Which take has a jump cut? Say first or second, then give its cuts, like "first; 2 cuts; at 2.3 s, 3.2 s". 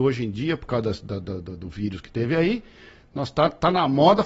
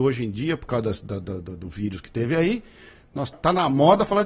second; 1 cut; at 3.3 s